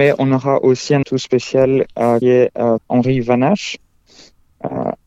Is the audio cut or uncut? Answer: cut